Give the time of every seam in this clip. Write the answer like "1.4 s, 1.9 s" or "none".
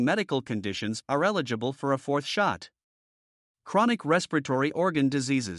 none

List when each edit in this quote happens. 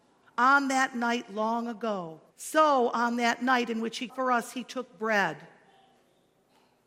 2.3 s, 4.1 s

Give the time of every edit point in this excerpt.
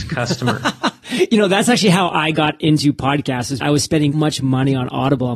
3.6 s, 4.1 s

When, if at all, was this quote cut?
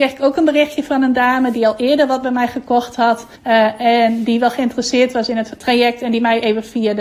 3.4 s, 5.6 s

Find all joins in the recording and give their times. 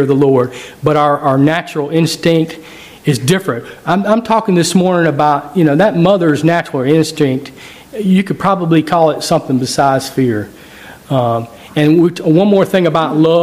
none

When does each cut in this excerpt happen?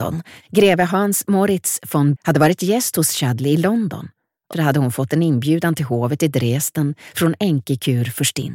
2.2 s, 4.5 s

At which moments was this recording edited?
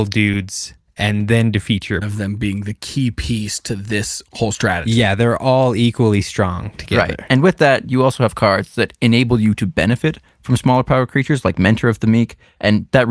2.0 s

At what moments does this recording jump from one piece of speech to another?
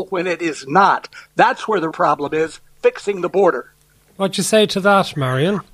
1.9 s, 3.9 s

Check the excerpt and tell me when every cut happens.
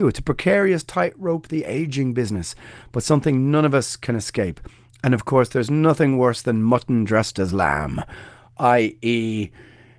none

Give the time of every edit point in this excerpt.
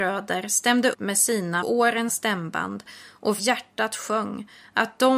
0.9 s, 1.6 s, 2.1 s, 3.4 s

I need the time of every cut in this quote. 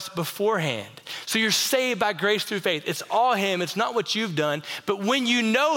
none

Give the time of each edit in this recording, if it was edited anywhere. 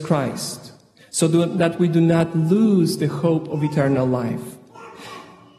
none

